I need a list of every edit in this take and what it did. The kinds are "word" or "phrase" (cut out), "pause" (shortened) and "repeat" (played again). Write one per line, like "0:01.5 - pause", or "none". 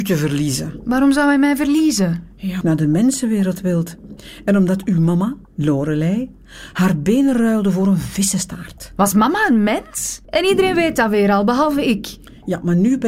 0:02.6 - phrase
0:05.4 - pause
0:10.2 - pause